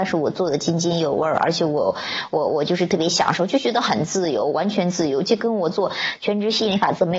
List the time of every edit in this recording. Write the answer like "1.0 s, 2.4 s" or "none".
none